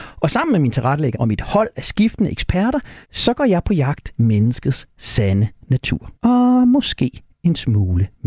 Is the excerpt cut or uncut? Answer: cut